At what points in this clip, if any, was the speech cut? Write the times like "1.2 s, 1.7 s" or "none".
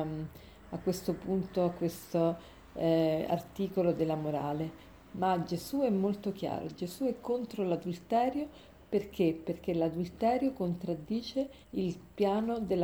11.6 s